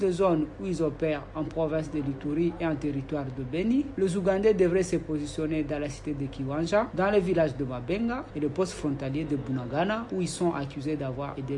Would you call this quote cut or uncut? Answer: uncut